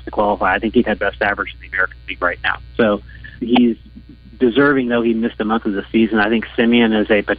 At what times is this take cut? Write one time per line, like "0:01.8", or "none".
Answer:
0:01.0
0:03.4
0:04.9